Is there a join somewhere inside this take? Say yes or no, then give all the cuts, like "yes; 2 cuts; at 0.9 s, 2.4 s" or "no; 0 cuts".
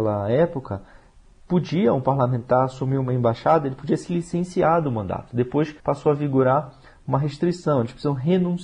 yes; 1 cut; at 5.8 s